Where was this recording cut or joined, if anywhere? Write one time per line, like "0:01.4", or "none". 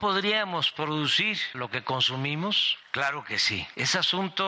0:01.5